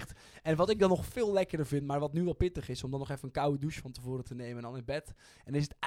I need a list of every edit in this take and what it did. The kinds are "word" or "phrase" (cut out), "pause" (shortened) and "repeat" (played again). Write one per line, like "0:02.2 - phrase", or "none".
none